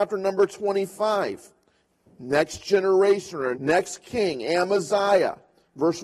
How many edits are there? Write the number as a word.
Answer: one